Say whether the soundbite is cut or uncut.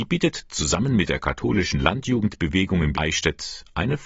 cut